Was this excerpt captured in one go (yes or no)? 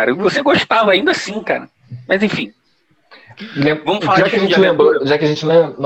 yes